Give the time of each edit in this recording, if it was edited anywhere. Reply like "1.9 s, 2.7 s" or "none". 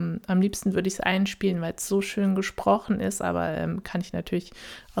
none